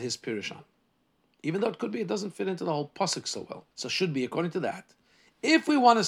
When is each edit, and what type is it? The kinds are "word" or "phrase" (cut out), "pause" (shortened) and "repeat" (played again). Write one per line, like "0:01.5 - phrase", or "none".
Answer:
0:03.7 - pause